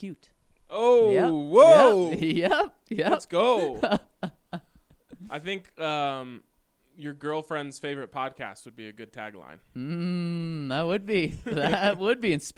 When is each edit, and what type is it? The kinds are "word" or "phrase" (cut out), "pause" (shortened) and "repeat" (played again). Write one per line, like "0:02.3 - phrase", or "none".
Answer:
none